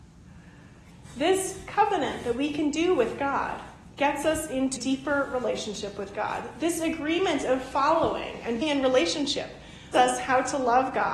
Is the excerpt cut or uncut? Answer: cut